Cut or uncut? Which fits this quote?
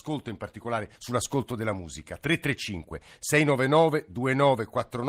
cut